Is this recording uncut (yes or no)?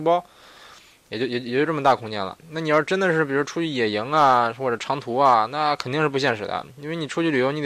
yes